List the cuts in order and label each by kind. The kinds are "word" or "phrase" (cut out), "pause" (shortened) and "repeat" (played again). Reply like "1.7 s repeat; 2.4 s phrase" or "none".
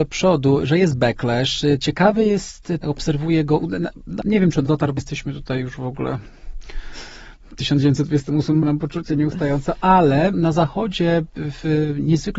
2.8 s word; 4.2 s word; 4.6 s word; 5.0 s word; 8.6 s word; 10.3 s word